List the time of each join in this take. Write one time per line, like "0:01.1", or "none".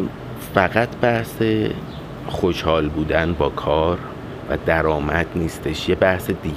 none

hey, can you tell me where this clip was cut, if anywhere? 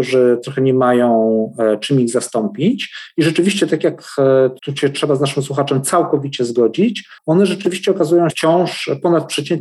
0:04.6
0:07.2
0:08.3

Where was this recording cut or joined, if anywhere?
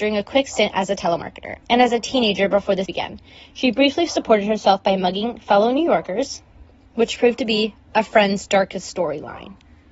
0:01.6
0:02.9

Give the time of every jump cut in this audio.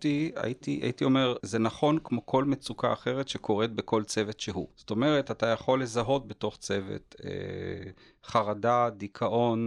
0:01.4
0:04.7

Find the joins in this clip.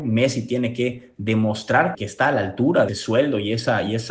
0:01.9
0:02.9

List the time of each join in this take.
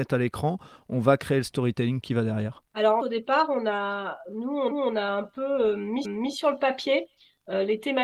0:03.0
0:04.7
0:06.0

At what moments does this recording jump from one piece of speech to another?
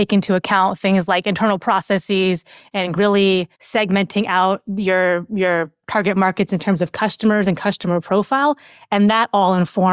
0:03.0
0:03.5

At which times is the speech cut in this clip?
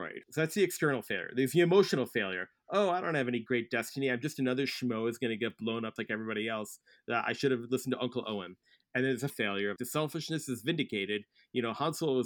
0:06.0
0:09.3
0:09.8

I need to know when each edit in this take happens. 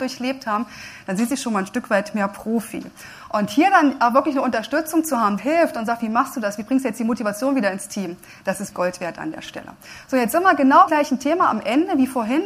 0:05.4
0:08.7
0:10.9

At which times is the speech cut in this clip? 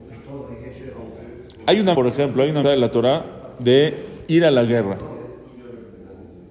0:01.9
0:02.6

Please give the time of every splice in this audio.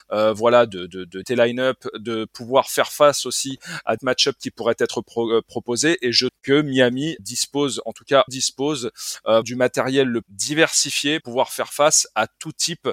0:01.2
0:04.0
0:06.3
0:07.2
0:08.3
0:09.4
0:10.2
0:11.2

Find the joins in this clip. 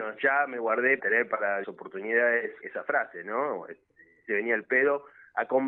0:01.0
0:01.6
0:02.6
0:04.2

